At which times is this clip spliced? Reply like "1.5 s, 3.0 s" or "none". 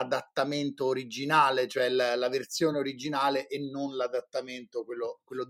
none